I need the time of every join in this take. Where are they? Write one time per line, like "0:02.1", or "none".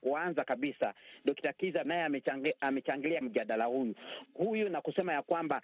0:01.8
0:03.2
0:04.3

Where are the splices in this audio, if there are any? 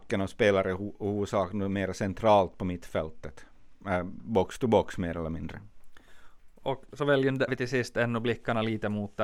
0:07.5

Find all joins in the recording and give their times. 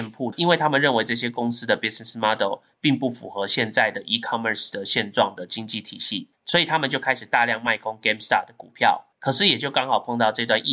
none

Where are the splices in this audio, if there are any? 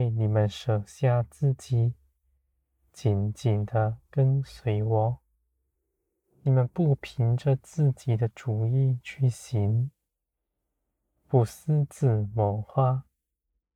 none

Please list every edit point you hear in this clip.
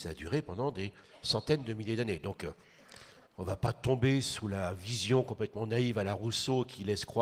0:03.3

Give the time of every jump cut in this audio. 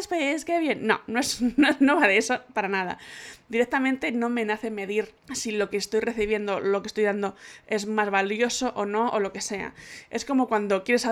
0:05.2

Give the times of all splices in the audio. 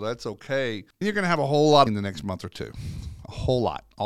0:01.0
0:01.9

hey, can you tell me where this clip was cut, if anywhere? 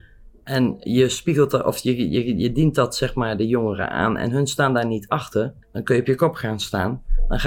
0:05.6

